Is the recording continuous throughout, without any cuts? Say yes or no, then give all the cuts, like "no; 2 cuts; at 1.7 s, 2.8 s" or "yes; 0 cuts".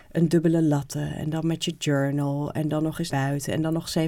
no; 1 cut; at 3.1 s